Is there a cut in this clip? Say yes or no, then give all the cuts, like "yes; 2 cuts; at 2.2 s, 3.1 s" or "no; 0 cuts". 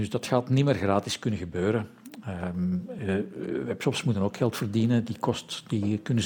no; 0 cuts